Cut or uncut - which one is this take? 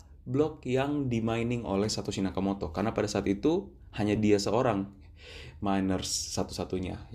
uncut